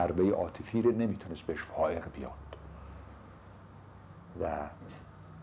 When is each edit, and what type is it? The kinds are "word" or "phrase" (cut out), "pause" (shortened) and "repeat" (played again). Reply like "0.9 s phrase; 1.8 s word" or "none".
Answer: none